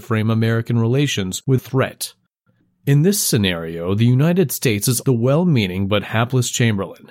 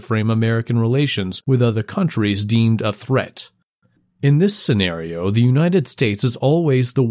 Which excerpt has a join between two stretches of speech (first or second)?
first